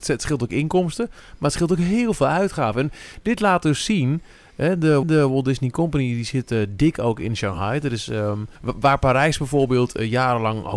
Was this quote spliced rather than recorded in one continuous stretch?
yes; 2 cuts; at 5.0 s, 8.6 s

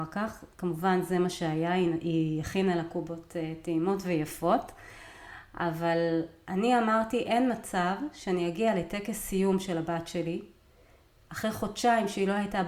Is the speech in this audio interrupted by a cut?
no; 0 cuts

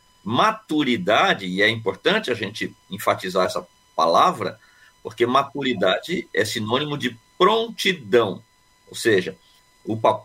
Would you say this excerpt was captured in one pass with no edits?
yes; 0 cuts

